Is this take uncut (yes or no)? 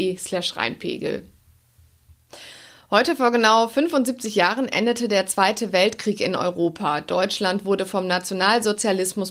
yes